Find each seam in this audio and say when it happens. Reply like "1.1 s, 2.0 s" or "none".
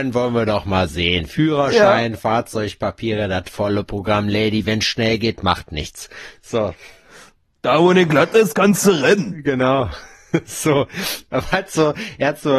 none

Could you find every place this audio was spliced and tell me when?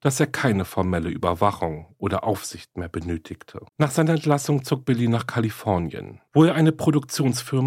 3.7 s

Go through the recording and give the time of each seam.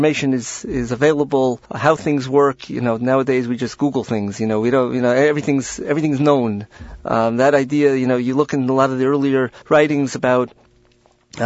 1.6 s, 9.6 s

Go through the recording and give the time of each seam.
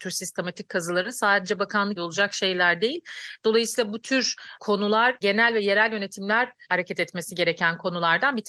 2.0 s, 5.2 s, 6.6 s

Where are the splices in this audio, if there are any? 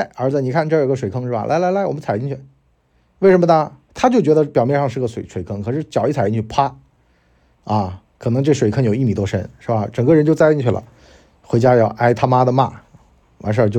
none

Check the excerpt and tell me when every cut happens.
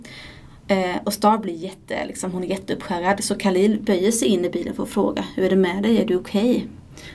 none

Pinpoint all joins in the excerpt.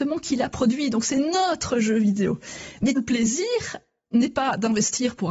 3.0 s

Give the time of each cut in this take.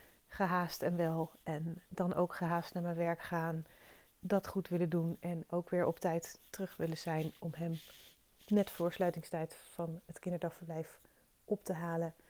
1.8 s, 4.1 s

